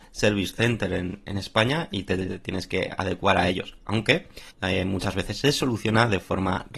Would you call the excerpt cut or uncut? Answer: cut